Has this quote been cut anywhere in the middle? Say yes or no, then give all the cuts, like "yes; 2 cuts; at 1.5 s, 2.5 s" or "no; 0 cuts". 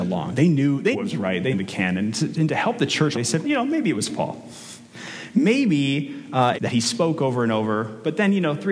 yes; 5 cuts; at 0.9 s, 1.5 s, 3.1 s, 3.4 s, 6.5 s